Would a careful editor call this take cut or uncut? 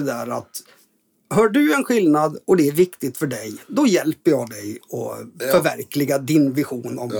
uncut